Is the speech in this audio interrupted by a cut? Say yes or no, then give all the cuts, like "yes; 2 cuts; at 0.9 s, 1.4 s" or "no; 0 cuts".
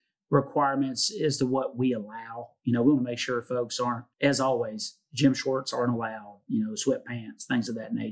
yes; 1 cut; at 4.1 s